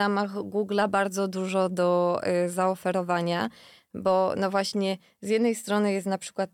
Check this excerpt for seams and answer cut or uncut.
uncut